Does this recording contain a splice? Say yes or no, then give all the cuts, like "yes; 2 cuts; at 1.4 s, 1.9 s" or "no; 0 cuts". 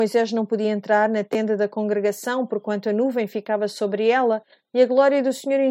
no; 0 cuts